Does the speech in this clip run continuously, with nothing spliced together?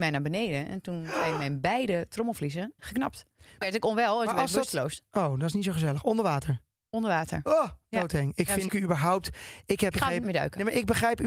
no; 5 cuts; at 2.8 s, 3.6 s, 8.7 s, 9.9 s, 10.2 s

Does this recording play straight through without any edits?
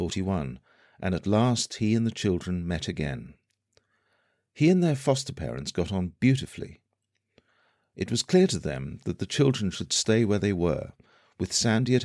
yes; 0 cuts

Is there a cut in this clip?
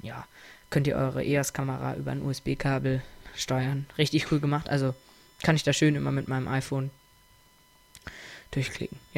no; 0 cuts

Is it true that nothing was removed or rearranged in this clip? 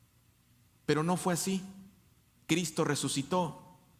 yes; 0 cuts

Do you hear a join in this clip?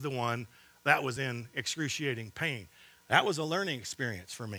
no; 0 cuts

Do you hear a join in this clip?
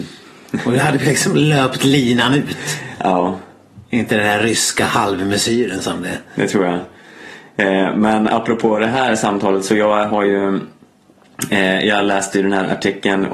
no; 0 cuts

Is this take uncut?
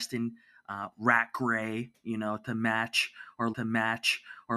no; 1 cut; at 3.5 s

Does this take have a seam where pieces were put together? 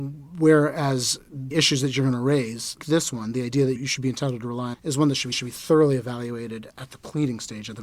yes; 5 cuts; at 1.5 s, 2.8 s, 3.8 s, 4.7 s, 5.3 s

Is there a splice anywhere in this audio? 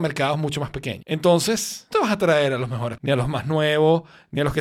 yes; 2 cuts; at 1.9 s, 3.0 s

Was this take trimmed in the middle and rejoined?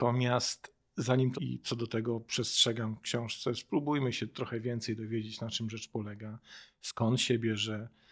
yes; 1 cut; at 1.3 s

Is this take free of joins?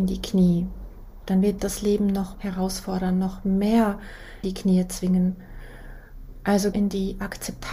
no; 4 cuts; at 1.6 s, 2.3 s, 4.4 s, 6.7 s

